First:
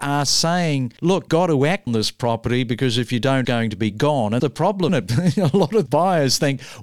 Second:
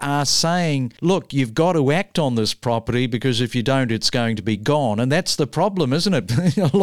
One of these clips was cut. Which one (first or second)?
first